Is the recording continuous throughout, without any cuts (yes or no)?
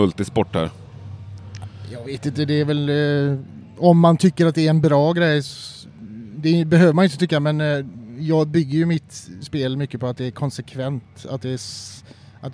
yes